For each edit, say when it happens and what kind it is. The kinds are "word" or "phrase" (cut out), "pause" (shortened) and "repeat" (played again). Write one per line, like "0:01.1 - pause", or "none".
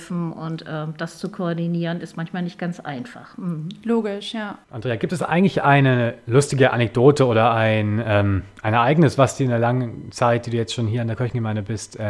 0:04.6 - pause